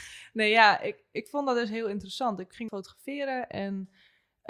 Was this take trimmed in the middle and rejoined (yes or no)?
yes